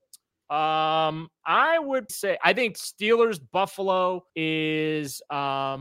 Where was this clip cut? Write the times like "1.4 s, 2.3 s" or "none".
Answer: 2.1 s, 4.3 s